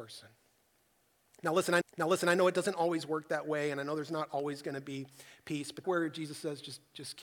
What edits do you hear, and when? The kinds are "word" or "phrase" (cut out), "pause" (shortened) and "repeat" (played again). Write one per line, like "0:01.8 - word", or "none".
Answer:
0:01.8 - repeat
0:05.8 - word

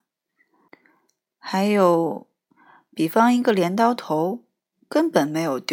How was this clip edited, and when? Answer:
none

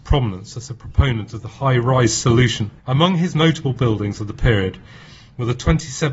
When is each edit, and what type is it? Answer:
0:02.8 - pause
0:03.3 - word

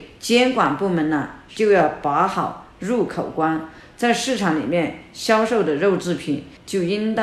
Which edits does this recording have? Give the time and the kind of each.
none

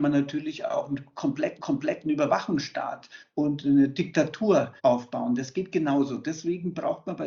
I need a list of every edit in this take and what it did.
0:01.6 - repeat
0:04.8 - pause

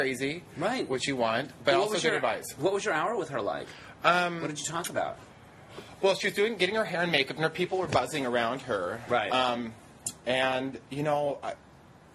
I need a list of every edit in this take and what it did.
none

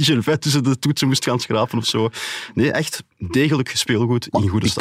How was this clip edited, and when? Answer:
0:03.1 - pause

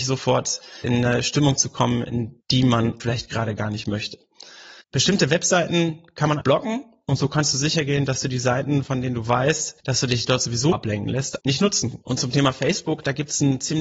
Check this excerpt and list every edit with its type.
0:02.4 - pause
0:03.0 - word
0:04.8 - pause
0:06.4 - word
0:09.8 - pause
0:10.7 - word
0:11.4 - word
0:12.0 - pause

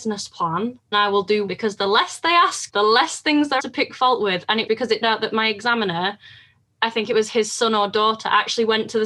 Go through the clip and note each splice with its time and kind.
0:00.9 - word
0:01.5 - word
0:02.7 - word
0:03.6 - word
0:04.7 - word
0:05.0 - word

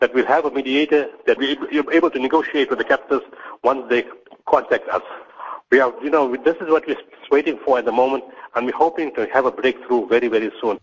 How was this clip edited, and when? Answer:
0:01.4 - word

